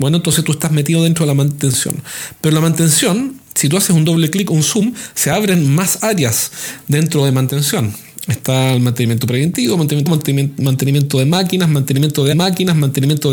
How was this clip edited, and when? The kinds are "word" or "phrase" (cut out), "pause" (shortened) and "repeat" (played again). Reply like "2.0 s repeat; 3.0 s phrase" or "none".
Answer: 10.1 s word; 12.3 s repeat